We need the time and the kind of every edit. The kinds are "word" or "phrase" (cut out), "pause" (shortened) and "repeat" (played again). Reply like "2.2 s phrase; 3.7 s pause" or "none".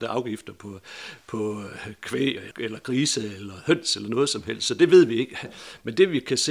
2.5 s word

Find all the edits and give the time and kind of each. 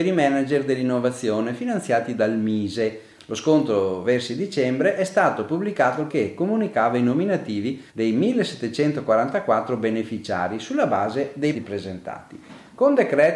6.1 s word; 7.9 s pause; 11.5 s word

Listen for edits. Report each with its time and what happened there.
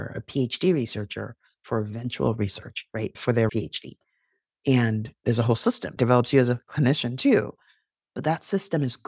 3.1 s word; 3.5 s word; 6.0 s word

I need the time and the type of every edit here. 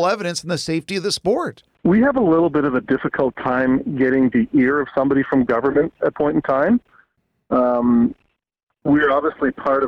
6.1 s word

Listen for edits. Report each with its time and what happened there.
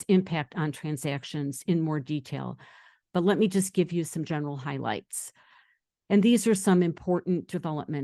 none

